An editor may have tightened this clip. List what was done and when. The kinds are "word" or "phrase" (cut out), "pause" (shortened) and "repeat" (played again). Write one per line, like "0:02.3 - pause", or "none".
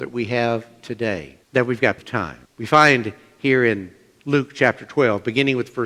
0:01.4 - pause
0:02.0 - word
0:02.5 - pause

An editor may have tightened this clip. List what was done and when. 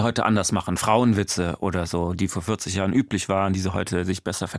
none

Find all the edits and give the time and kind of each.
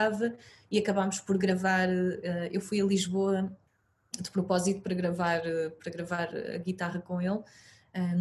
none

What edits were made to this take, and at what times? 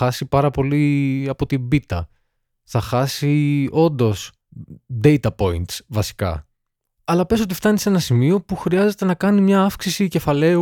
none

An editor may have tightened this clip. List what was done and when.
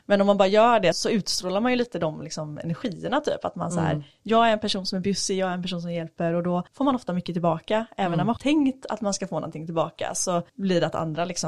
0:00.9 - word
0:06.7 - pause
0:08.4 - phrase
0:10.5 - pause

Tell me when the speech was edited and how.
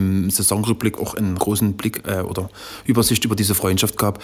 0:01.0 - phrase
0:01.4 - word

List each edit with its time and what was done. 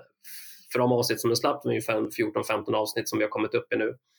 none

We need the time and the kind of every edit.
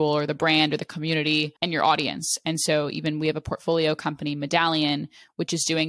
0:01.6 - pause

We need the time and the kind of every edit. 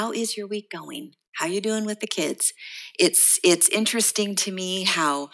0:01.3 - pause

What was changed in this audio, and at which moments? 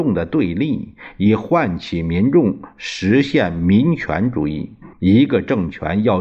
0:04.9 - pause

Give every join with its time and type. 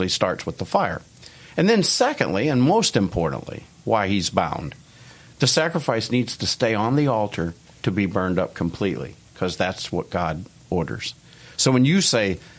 0:07.7 - pause

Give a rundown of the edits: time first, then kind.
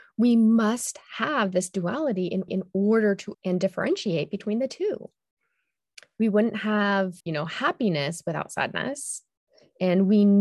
0:02.5 - repeat
0:03.3 - word
0:07.2 - pause

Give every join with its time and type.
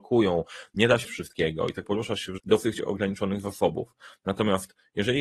0:01.0 - word
0:01.8 - word
0:02.4 - word

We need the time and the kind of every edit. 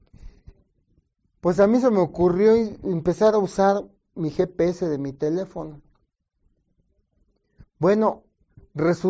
none

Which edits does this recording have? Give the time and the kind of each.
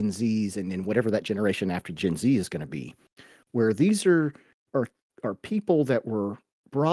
none

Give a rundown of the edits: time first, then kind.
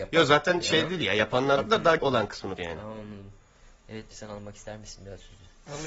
0:01.6 - word
0:02.0 - word
0:02.6 - word
0:04.1 - word

